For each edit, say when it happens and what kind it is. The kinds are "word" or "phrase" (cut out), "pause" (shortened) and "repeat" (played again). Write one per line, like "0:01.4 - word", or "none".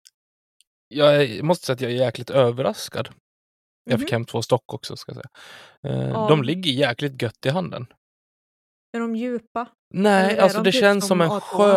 0:09.8 - pause